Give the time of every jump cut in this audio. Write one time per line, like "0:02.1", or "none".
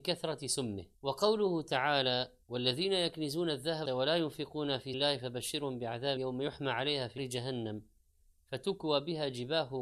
0:00.9
0:02.4
0:03.9
0:04.9
0:06.2
0:07.2